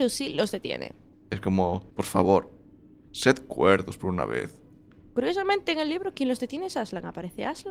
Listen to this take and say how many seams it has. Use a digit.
2